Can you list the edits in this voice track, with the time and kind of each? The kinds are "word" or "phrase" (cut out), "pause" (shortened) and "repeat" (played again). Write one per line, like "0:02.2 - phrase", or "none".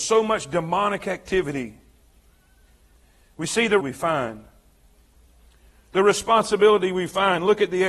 0:03.8 - word

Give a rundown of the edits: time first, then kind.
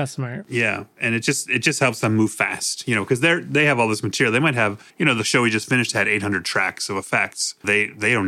0:04.9 - pause

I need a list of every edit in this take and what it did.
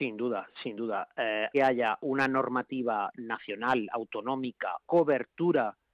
0:01.5 - phrase
0:04.8 - phrase

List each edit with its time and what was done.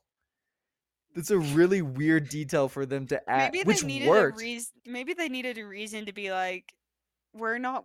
0:04.8 - pause

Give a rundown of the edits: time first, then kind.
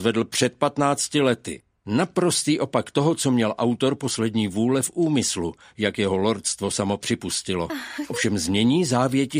none

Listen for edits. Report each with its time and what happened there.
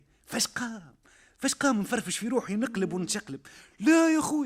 none

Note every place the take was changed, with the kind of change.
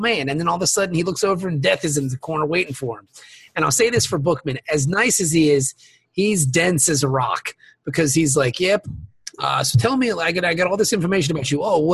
none

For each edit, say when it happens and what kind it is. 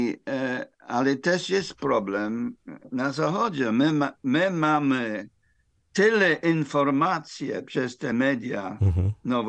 none

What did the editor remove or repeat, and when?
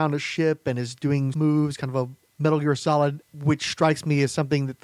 0:01.3 - word
0:03.2 - word

